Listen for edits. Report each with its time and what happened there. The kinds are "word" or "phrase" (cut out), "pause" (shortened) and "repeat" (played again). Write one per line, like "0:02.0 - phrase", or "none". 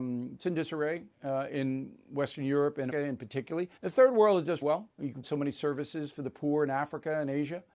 0:01.1 - pause
0:02.9 - word
0:03.8 - pause
0:04.6 - word
0:04.9 - pause
0:05.2 - word